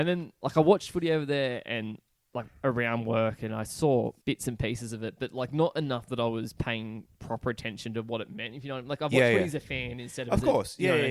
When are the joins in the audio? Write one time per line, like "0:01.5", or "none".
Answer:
0:04.2
0:07.1